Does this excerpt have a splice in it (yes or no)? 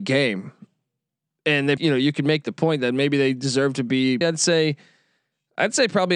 yes